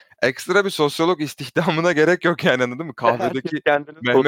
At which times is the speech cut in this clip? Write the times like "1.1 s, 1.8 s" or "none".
none